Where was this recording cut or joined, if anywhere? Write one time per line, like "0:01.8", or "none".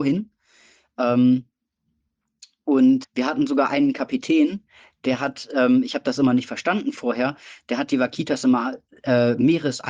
0:03.0